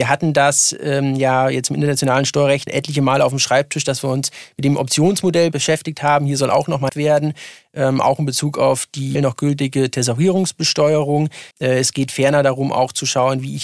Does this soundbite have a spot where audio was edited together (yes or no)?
yes